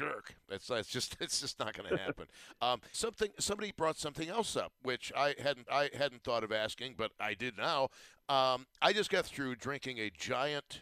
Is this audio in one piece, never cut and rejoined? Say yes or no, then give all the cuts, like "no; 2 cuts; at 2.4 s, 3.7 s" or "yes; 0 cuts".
no; 3 cuts; at 2.9 s, 5.7 s, 7.1 s